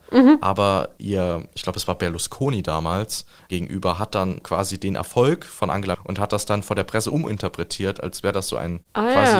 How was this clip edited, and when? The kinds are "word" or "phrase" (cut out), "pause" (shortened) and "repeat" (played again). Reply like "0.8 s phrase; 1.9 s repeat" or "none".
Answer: 4.4 s word; 5.9 s phrase